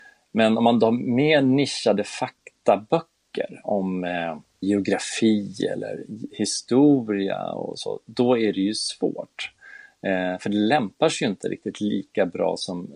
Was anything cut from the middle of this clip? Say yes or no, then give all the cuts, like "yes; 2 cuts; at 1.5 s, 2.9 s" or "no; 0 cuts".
yes; 1 cut; at 4.4 s